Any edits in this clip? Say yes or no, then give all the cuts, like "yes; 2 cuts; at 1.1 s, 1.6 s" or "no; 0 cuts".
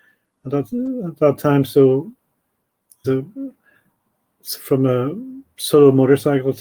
yes; 1 cut; at 3.0 s